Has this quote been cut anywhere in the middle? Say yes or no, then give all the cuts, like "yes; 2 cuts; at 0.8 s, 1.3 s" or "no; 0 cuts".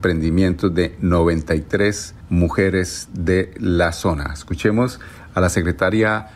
no; 0 cuts